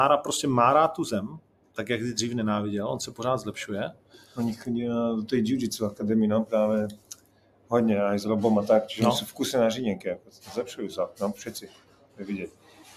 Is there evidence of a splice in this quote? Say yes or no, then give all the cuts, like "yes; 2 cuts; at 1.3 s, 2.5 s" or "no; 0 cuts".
no; 0 cuts